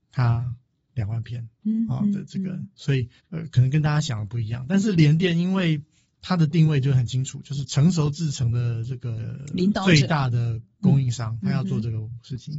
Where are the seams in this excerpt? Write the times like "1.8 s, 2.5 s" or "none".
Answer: 1.5 s, 3.2 s